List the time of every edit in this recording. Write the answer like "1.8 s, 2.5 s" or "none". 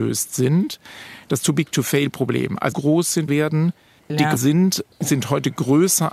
2.7 s, 3.3 s, 4.0 s, 4.4 s